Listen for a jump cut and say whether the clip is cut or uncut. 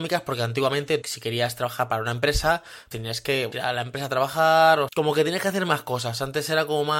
cut